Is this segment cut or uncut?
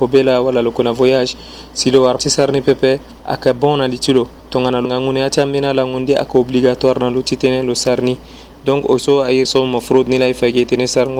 cut